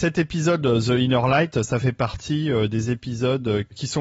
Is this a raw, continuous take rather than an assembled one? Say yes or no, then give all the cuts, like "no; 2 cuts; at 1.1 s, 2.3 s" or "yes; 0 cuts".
yes; 0 cuts